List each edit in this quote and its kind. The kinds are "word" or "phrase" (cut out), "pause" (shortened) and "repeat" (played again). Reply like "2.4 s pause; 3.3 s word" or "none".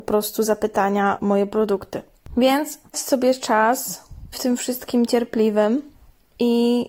1.2 s word; 2.9 s word; 4.3 s word